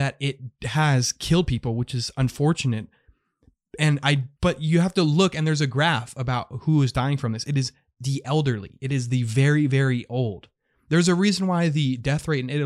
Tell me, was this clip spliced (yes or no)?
yes